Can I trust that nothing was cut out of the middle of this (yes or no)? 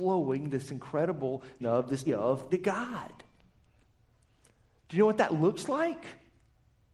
no